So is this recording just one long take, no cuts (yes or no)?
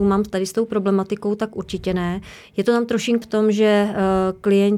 no